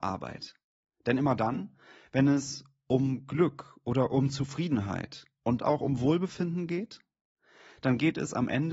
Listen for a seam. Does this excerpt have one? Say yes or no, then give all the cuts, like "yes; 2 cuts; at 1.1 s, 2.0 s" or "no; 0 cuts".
yes; 1 cut; at 5.6 s